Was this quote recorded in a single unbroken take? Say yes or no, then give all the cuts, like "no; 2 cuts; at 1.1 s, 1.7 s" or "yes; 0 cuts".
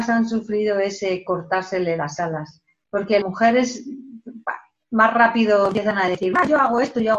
no; 1 cut; at 3.2 s